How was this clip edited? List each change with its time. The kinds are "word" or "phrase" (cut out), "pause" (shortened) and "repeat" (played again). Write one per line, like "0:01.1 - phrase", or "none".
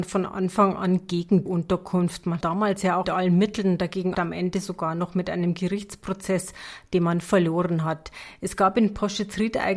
0:01.5 - word
0:02.4 - word
0:03.0 - word
0:04.1 - word